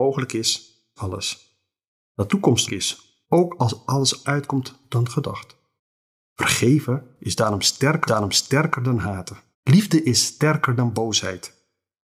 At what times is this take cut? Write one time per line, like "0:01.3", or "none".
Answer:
0:01.0
0:02.3
0:02.7
0:03.2
0:04.2
0:05.8
0:08.1
0:09.5